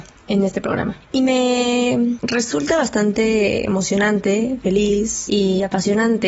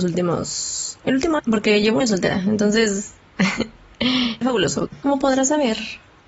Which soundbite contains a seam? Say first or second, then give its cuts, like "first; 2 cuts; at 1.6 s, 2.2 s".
second; 3 cuts; at 1.4 s, 2.0 s, 4.4 s